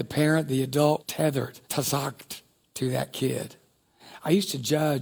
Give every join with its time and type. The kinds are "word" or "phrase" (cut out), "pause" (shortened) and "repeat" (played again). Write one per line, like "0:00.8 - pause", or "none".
0:01.0 - word
0:01.6 - pause

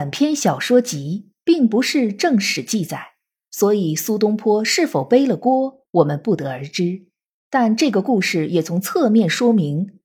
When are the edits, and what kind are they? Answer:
none

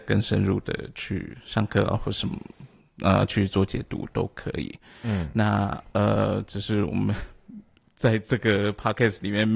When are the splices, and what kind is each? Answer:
none

